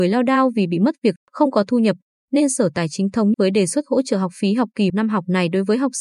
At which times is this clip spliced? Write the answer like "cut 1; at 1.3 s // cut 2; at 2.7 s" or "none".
cut 1; at 1.2 s // cut 2; at 3.3 s // cut 3; at 4.9 s